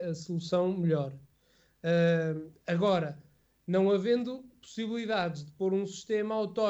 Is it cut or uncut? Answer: uncut